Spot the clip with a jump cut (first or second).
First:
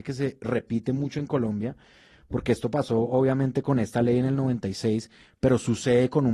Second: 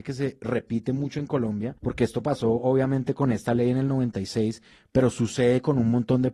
second